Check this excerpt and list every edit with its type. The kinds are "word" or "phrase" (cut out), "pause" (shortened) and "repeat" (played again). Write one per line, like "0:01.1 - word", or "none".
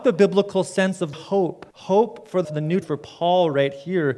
0:01.1 - word
0:01.7 - pause
0:02.4 - word
0:02.8 - phrase